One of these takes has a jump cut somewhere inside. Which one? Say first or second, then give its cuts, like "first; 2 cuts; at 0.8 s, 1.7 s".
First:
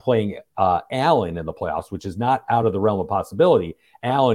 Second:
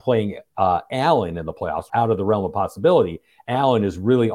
second; 1 cut; at 1.9 s